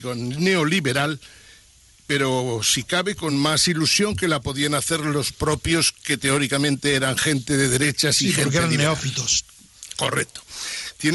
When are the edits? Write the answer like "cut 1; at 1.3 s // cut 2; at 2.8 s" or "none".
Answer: none